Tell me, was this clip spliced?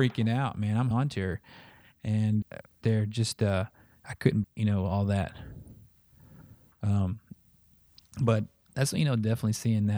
yes; 4 cuts; at 0.9 s, 2.4 s, 2.8 s, 4.4 s

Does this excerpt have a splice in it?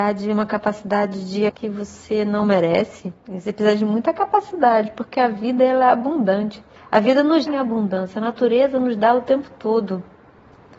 yes; 4 cuts; at 1.5 s, 3.2 s, 6.8 s, 7.5 s

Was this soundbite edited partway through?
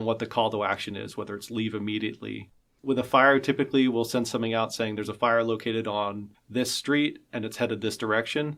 no; 0 cuts

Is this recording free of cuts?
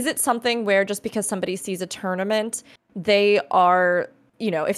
yes; 0 cuts

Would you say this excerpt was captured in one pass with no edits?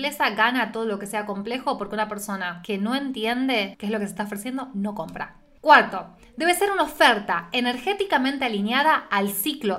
yes; 0 cuts

